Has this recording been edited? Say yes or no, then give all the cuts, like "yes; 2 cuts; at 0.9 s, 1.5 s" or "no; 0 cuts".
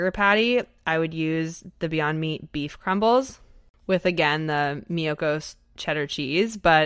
no; 0 cuts